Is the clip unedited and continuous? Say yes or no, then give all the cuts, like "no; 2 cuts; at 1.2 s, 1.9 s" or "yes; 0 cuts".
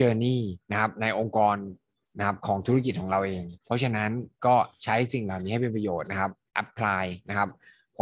no; 1 cut; at 3.6 s